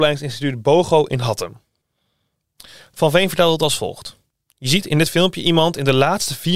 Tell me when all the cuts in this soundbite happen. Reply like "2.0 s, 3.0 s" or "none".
none